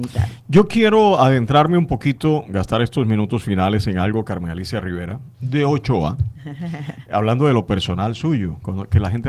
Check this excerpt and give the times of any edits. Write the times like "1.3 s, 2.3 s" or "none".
none